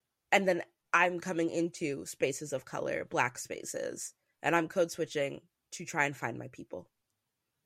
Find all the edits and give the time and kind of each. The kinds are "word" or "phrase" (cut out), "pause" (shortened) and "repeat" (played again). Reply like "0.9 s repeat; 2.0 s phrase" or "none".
none